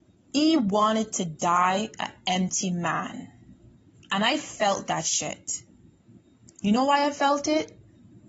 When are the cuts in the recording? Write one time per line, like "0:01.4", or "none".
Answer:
none